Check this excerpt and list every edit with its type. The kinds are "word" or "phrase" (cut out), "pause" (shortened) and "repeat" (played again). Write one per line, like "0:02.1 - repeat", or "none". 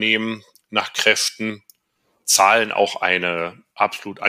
none